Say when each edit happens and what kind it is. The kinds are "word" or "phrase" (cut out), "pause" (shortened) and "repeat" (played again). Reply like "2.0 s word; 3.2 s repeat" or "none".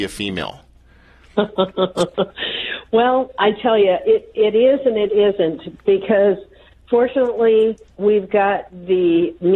none